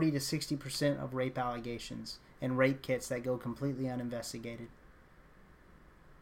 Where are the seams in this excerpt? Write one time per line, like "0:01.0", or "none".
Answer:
none